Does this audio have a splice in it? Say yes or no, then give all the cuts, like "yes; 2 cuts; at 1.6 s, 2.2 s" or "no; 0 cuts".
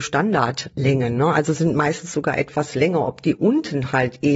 no; 0 cuts